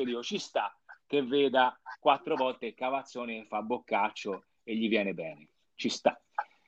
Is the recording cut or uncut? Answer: uncut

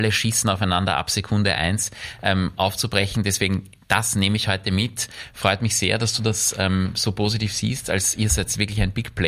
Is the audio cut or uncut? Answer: uncut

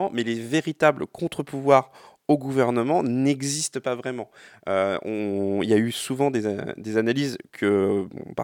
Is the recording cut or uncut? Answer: uncut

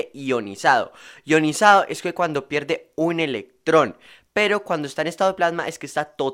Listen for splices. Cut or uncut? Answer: uncut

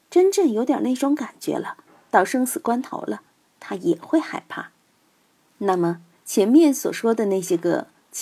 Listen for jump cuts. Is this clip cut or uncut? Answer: uncut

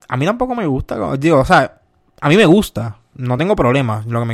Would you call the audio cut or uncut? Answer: uncut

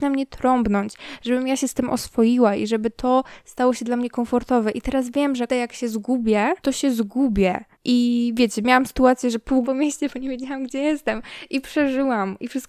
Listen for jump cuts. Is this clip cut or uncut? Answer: cut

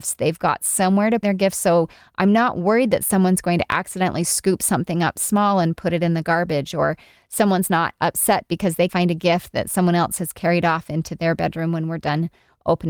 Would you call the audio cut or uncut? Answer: cut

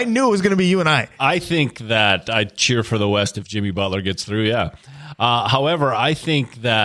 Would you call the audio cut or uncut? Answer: uncut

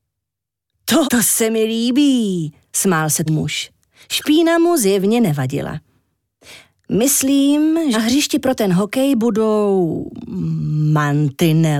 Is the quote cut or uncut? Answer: cut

